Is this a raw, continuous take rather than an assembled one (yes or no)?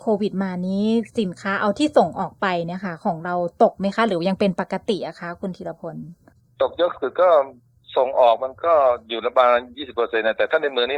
no